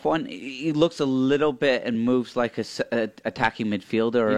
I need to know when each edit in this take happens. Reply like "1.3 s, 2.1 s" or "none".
none